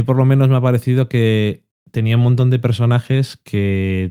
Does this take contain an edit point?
no; 0 cuts

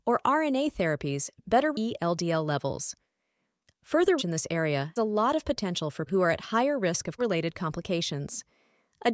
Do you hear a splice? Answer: yes; 5 cuts; at 1.7 s, 4.2 s, 5.0 s, 6.1 s, 7.2 s

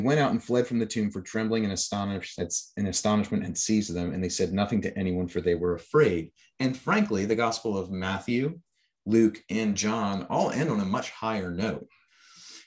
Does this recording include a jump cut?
no; 0 cuts

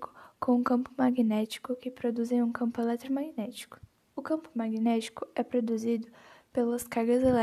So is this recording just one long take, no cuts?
no; 1 cut; at 4.0 s

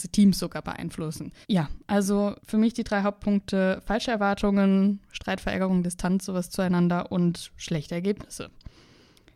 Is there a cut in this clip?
yes; 2 cuts; at 1.4 s, 2.4 s

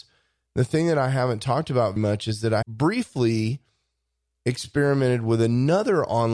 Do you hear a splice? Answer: yes; 2 cuts; at 2.0 s, 2.6 s

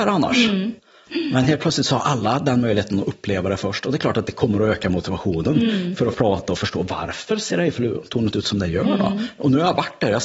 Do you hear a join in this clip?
yes; 1 cut; at 6.1 s

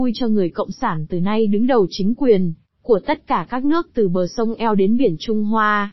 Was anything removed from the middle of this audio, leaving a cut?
no; 0 cuts

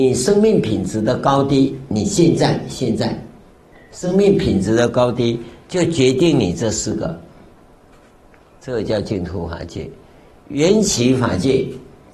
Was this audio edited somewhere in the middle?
no; 0 cuts

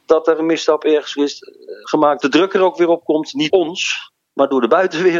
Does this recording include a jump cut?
yes; 2 cuts; at 2.2 s, 3.5 s

